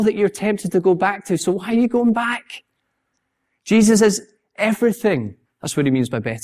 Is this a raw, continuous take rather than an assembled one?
yes; 0 cuts

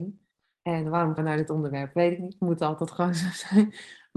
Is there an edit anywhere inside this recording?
yes; 1 cut; at 1.2 s

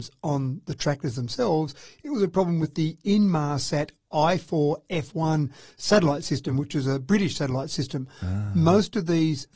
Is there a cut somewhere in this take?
no; 0 cuts

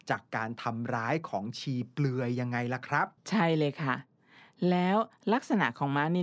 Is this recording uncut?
no; 1 cut; at 3.2 s

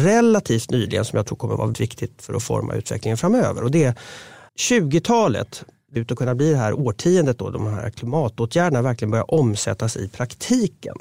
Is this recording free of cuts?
no; 3 cuts; at 1.7 s, 4.5 s, 6.0 s

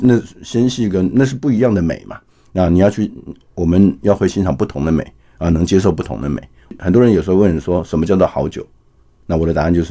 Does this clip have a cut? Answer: no; 0 cuts

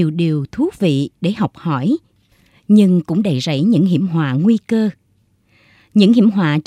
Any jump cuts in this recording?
no; 0 cuts

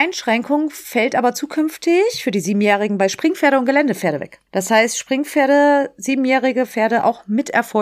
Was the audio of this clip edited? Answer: yes; 1 cut; at 4.5 s

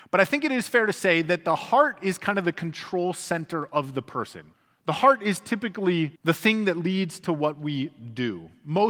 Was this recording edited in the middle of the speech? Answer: yes; 2 cuts; at 4.5 s, 6.2 s

